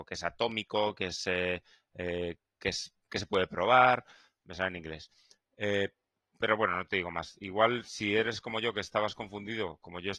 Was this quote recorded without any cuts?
yes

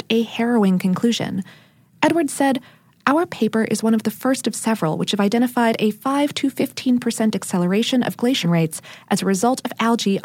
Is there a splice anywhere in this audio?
yes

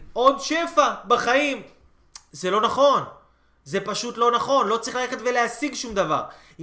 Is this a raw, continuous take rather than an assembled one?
yes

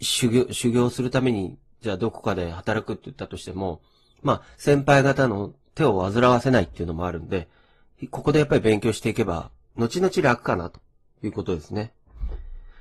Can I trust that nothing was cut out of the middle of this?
yes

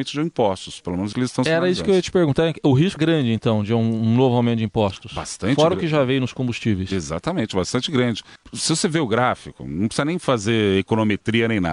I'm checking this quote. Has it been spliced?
yes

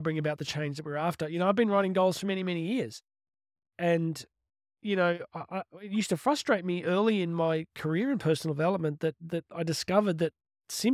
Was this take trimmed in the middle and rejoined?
no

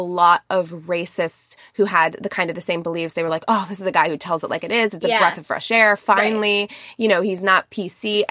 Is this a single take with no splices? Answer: yes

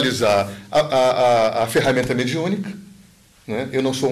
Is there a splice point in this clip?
no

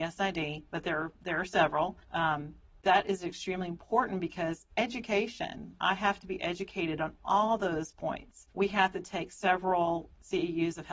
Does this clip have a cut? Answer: yes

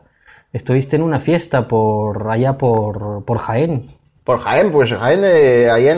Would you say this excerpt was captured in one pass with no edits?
yes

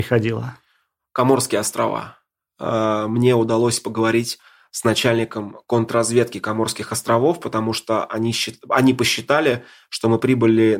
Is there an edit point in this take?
no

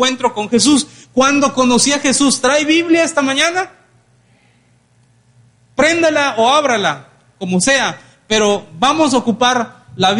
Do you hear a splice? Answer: no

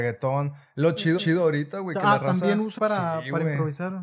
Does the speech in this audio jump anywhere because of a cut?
yes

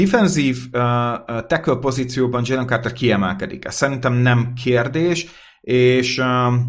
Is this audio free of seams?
yes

